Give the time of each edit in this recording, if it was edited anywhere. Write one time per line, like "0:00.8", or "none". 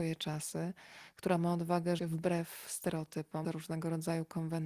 0:02.0
0:03.4